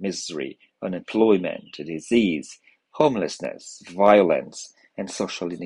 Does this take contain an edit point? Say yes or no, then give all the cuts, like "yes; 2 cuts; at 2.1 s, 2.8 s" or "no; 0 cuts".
no; 0 cuts